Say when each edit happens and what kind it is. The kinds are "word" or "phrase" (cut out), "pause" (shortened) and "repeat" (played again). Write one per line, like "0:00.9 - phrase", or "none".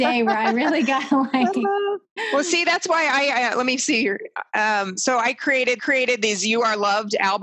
0:05.8 - repeat